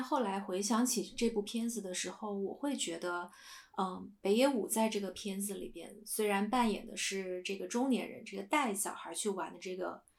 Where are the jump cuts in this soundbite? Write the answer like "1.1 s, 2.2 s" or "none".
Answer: none